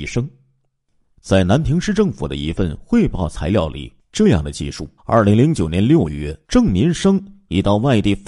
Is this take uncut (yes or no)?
no